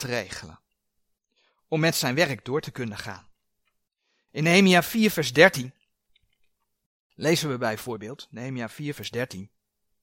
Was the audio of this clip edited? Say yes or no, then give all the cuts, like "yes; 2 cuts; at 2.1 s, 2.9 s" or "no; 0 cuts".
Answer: no; 0 cuts